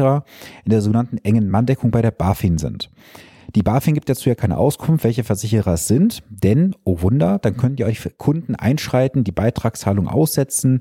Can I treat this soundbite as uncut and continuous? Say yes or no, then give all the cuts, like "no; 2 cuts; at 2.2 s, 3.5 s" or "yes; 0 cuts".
yes; 0 cuts